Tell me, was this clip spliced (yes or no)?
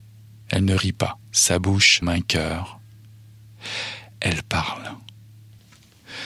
yes